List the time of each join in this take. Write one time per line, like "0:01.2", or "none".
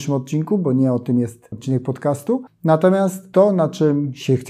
0:01.5